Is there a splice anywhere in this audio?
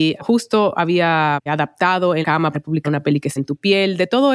yes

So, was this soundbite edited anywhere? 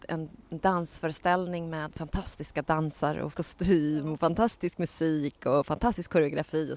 yes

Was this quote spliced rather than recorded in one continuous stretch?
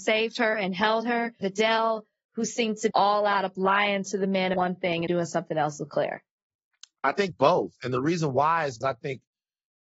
yes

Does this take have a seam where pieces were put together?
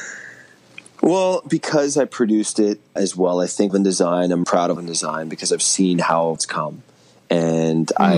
yes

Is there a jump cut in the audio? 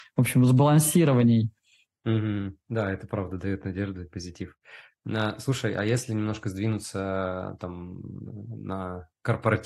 no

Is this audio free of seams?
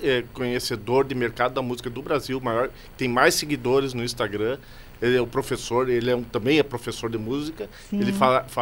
yes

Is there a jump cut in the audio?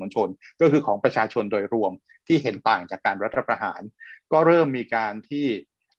no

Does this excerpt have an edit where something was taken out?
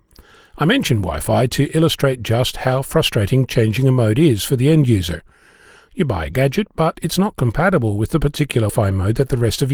yes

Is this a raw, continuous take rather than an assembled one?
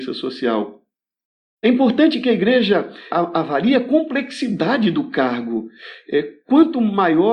no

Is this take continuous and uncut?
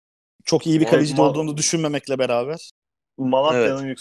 yes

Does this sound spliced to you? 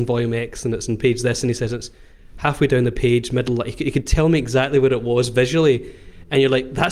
no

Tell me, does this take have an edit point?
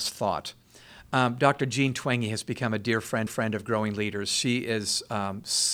yes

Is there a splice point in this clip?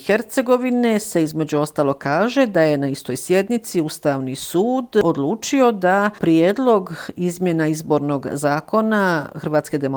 no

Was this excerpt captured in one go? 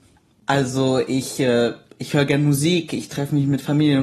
yes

